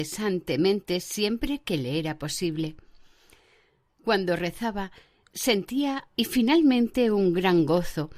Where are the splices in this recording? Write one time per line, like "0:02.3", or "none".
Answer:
0:06.1